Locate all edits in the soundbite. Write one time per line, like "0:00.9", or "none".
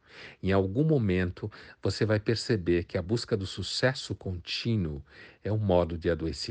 none

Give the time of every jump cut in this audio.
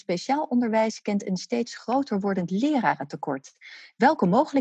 none

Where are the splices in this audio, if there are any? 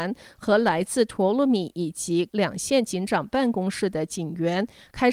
0:02.3

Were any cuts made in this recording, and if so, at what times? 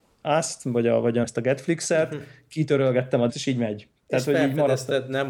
0:01.2
0:03.3

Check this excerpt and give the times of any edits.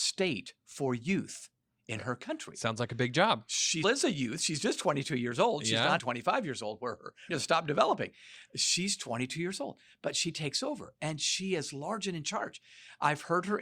0:03.8
0:06.0
0:07.3

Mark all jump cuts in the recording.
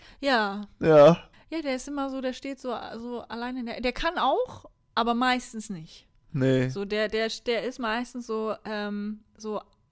0:01.3

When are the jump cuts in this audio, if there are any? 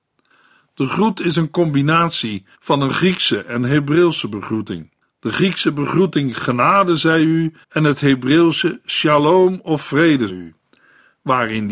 0:02.5
0:05.0
0:07.6
0:10.3

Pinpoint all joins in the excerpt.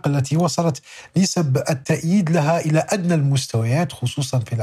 none

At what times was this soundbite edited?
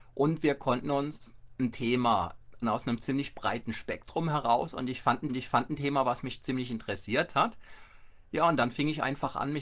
0:02.6
0:05.3

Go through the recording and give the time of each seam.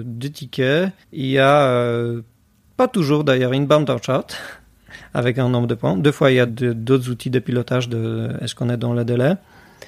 0:01.0
0:02.4
0:06.5

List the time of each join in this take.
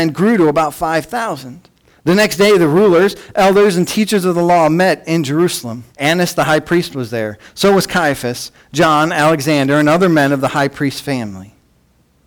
0:01.9
0:05.9

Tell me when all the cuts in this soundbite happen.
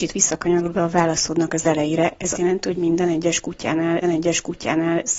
0:02.3
0:04.0

